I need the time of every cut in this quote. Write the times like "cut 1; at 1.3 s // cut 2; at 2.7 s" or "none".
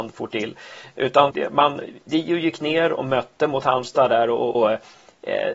cut 1; at 1.3 s // cut 2; at 4.5 s